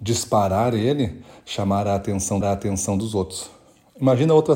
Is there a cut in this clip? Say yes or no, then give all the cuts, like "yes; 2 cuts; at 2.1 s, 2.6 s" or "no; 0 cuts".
yes; 1 cut; at 2.4 s